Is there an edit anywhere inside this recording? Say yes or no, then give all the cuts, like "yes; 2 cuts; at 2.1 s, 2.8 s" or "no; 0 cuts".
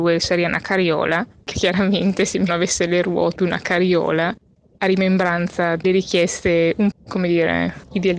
yes; 5 cuts; at 1.5 s, 2.5 s, 3.4 s, 5.8 s, 6.9 s